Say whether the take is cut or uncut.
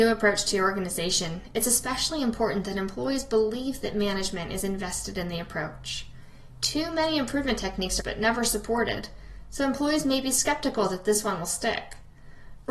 cut